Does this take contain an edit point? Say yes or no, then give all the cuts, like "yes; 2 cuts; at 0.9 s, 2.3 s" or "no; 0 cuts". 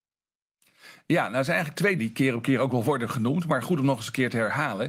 yes; 1 cut; at 2.0 s